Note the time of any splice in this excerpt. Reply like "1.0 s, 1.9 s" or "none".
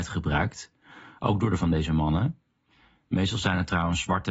1.6 s